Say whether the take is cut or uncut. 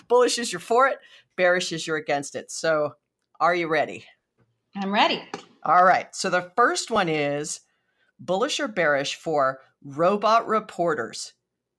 uncut